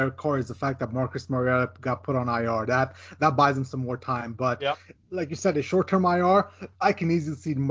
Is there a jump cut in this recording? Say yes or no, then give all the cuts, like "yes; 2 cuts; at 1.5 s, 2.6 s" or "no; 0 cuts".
yes; 1 cut; at 6.7 s